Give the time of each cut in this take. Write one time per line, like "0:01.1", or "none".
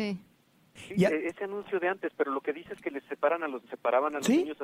0:03.7